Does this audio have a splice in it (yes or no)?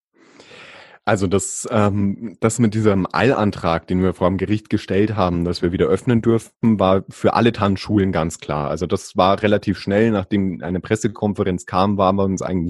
no